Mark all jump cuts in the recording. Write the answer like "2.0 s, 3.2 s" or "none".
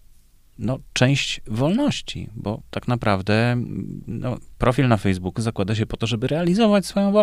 none